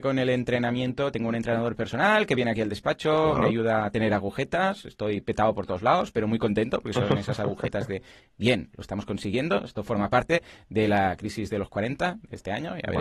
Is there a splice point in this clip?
no; 0 cuts

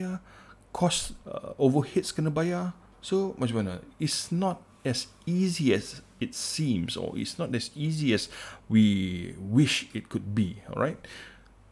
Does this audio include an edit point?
no; 0 cuts

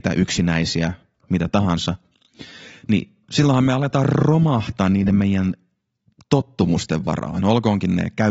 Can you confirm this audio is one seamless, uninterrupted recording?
yes; 0 cuts

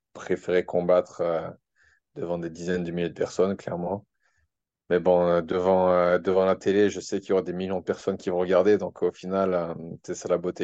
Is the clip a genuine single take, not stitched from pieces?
yes; 0 cuts

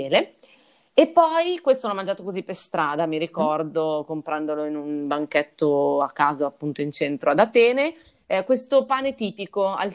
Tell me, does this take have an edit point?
no; 0 cuts

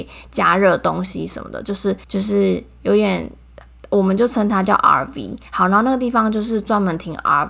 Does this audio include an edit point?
yes; 1 cut; at 2.0 s

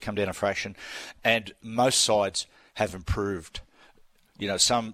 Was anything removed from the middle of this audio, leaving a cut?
no; 0 cuts

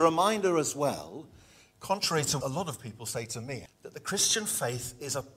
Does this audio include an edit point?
yes; 2 cuts; at 2.4 s, 3.7 s

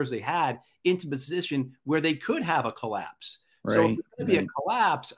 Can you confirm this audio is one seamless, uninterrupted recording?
yes; 0 cuts

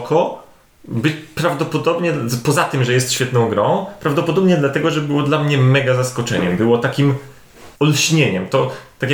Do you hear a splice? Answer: yes; 1 cut; at 7.7 s

